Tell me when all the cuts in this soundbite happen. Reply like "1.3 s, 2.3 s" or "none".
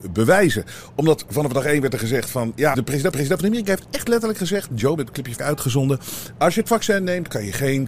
2.7 s, 3.1 s, 5.0 s, 5.4 s

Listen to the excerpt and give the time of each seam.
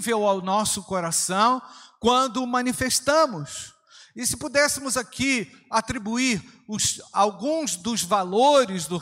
none

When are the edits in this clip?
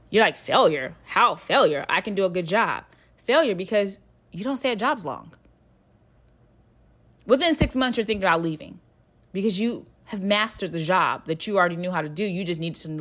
none

